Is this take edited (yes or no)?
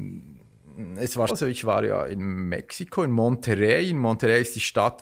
yes